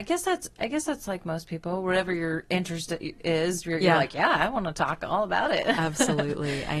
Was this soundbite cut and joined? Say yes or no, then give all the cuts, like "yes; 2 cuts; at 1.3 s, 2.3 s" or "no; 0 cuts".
no; 0 cuts